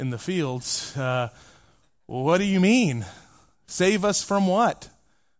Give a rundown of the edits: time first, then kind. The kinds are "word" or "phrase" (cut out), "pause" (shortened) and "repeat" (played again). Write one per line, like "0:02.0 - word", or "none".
none